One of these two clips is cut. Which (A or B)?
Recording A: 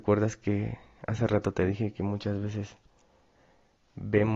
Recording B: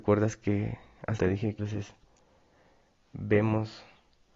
B